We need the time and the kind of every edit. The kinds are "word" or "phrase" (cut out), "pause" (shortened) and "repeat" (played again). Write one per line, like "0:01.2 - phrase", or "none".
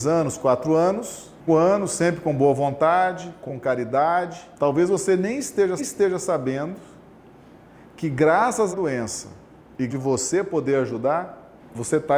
0:01.5 - word
0:03.5 - word
0:04.6 - pause
0:05.8 - repeat
0:08.7 - word
0:09.9 - phrase